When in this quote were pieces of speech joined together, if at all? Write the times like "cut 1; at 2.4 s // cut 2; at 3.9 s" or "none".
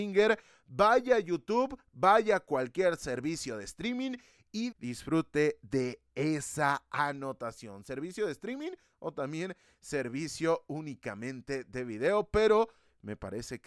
cut 1; at 4.7 s